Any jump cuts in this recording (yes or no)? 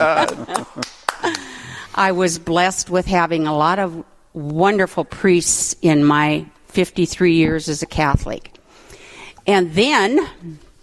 no